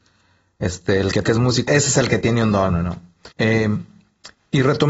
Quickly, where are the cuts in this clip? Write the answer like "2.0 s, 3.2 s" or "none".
1.2 s, 1.7 s, 2.7 s, 3.3 s